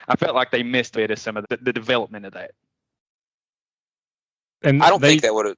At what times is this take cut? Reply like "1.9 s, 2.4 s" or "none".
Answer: 0.9 s, 1.4 s, 1.7 s